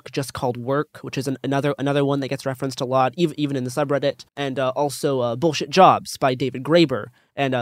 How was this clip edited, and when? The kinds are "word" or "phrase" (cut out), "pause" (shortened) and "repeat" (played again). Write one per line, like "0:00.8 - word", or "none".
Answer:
0:04.3 - pause